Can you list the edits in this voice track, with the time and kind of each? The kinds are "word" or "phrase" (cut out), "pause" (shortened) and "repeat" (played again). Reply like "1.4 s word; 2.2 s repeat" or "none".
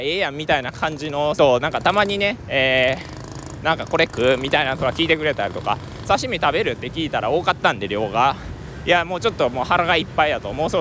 1.3 s phrase; 6.0 s phrase